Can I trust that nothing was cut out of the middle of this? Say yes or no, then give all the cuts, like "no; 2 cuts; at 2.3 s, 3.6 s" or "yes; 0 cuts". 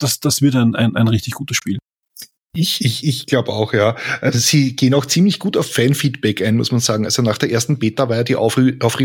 yes; 0 cuts